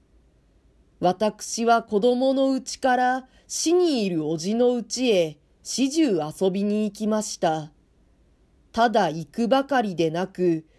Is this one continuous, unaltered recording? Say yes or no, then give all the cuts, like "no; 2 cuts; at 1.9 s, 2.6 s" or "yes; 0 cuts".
yes; 0 cuts